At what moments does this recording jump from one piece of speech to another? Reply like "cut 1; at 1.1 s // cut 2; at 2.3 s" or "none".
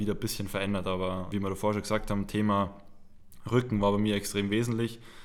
cut 1; at 1.3 s